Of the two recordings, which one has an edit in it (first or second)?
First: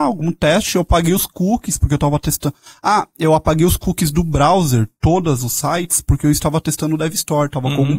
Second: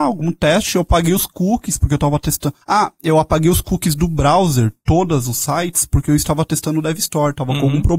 second